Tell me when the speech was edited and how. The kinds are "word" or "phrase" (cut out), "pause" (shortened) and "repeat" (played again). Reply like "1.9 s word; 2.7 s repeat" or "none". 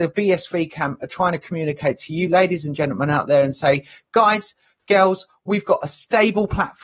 none